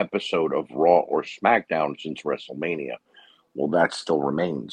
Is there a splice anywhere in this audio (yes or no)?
no